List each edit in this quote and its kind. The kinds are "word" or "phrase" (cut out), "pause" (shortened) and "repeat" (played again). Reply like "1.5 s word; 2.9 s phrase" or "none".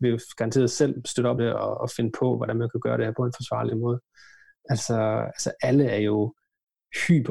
1.0 s word; 1.4 s word

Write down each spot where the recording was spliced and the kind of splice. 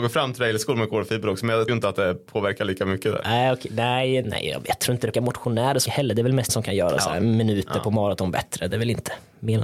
1.7 s word; 5.1 s word; 5.9 s word; 6.5 s word

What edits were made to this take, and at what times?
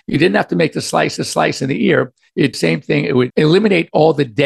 1.2 s repeat; 2.5 s phrase; 3.3 s word

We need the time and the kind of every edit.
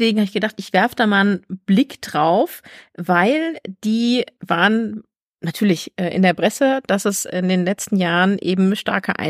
none

